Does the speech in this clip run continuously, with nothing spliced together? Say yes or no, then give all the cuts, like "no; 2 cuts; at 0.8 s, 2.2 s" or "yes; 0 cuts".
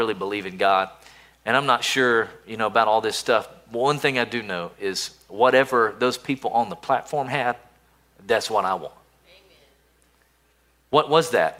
yes; 0 cuts